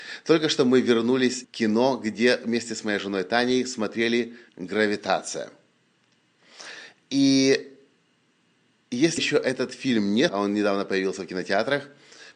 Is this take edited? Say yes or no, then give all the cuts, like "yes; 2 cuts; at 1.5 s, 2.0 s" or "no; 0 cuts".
yes; 4 cuts; at 1.4 s, 4.5 s, 9.2 s, 10.3 s